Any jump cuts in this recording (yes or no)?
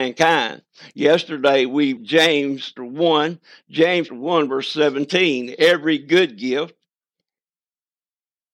yes